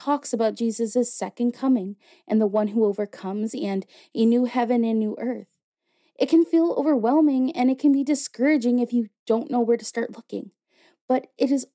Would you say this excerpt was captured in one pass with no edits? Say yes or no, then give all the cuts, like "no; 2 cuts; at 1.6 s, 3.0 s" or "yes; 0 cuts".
yes; 0 cuts